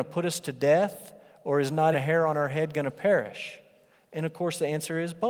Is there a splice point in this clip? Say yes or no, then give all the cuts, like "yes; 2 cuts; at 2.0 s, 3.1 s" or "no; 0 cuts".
yes; 1 cut; at 1.9 s